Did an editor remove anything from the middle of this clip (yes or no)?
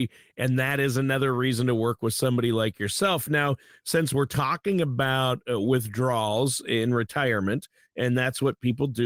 no